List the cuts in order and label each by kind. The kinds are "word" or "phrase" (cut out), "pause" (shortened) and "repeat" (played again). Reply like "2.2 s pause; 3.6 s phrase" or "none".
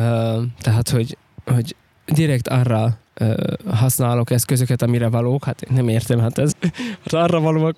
3.1 s pause; 6.5 s word